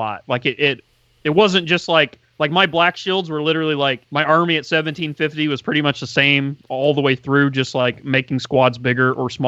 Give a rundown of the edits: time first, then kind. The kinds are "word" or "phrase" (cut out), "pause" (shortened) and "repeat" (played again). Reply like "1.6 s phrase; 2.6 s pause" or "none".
4.0 s pause